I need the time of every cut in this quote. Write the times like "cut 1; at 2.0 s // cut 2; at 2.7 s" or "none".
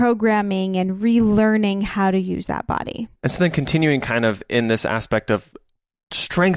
none